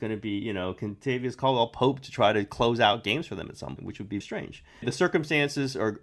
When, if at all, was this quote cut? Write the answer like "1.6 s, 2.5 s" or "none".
3.8 s, 4.2 s